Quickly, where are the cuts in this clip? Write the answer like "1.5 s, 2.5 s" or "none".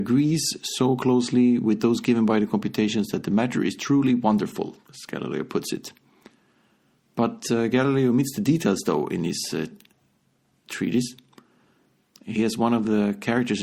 none